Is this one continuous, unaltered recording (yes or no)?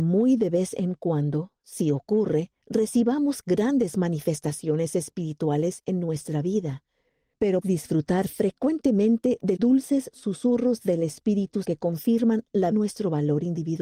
no